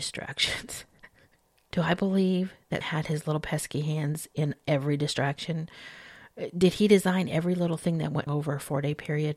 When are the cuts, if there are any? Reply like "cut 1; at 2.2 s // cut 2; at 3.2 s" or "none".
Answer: cut 1; at 1.7 s // cut 2; at 2.8 s // cut 3; at 8.3 s